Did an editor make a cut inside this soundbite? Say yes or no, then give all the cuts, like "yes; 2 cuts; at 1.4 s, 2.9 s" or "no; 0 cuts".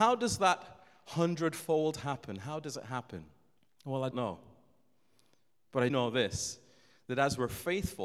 yes; 3 cuts; at 3.6 s, 4.1 s, 5.9 s